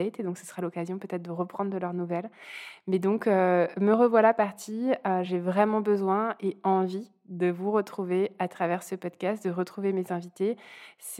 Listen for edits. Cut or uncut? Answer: uncut